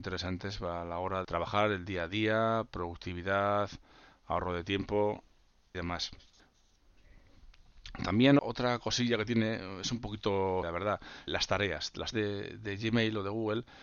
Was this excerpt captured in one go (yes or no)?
no